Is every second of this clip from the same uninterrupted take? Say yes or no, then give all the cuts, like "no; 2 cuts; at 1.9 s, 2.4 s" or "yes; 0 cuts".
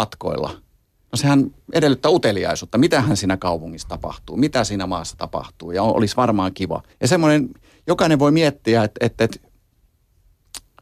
no; 1 cut; at 6.9 s